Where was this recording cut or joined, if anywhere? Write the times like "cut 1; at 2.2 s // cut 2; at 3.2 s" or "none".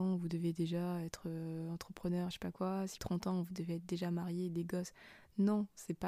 cut 1; at 3.0 s